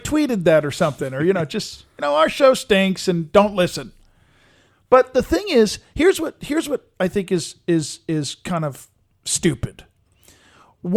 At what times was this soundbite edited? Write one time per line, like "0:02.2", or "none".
none